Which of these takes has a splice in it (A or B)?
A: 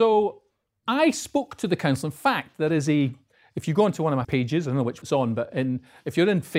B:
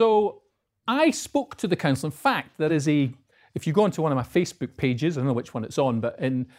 A